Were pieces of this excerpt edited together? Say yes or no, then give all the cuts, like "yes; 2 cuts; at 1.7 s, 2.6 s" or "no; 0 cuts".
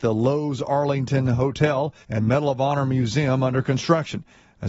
yes; 1 cut; at 2.0 s